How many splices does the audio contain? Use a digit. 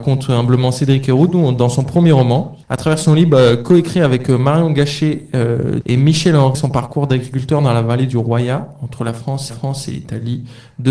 4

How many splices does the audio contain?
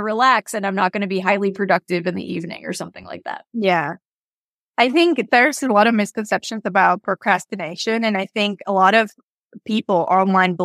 0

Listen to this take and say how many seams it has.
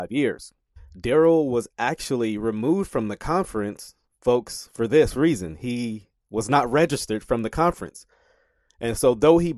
1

